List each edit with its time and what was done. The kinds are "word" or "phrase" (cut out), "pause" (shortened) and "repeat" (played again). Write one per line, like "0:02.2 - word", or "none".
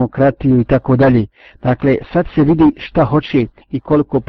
none